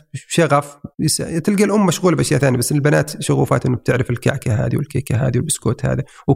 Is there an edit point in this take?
yes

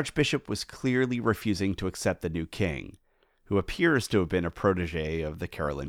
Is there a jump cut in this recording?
no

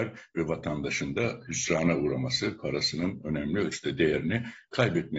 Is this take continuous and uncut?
yes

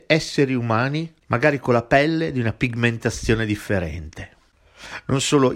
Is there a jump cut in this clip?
no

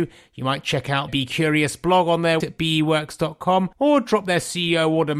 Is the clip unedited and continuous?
no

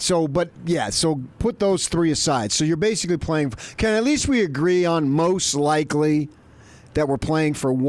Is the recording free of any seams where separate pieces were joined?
yes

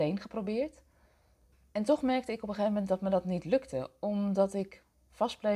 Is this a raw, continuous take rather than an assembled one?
yes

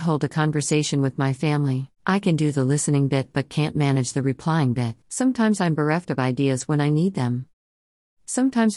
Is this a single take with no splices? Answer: no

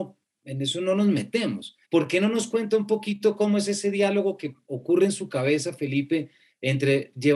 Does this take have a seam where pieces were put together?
yes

